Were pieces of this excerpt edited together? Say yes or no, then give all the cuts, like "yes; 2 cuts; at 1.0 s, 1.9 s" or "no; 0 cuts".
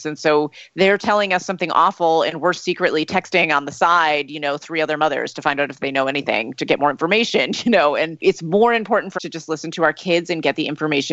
yes; 1 cut; at 9.2 s